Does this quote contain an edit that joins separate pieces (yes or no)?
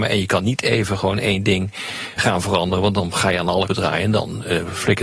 yes